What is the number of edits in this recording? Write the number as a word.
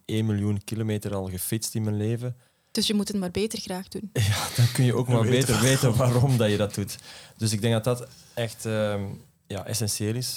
zero